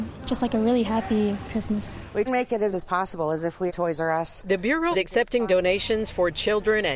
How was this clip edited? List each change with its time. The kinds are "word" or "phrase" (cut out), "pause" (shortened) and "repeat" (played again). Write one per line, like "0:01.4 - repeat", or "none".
0:02.3 - word
0:02.7 - word
0:03.7 - word
0:04.9 - word